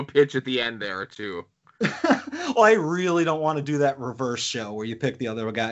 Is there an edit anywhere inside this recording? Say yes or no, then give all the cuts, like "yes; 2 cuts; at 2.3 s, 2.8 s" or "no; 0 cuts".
no; 0 cuts